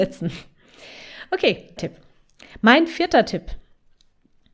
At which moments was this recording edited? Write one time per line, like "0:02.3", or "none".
0:01.8